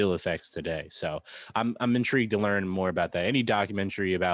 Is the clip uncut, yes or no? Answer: yes